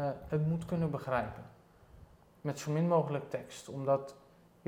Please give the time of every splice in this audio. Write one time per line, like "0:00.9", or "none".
none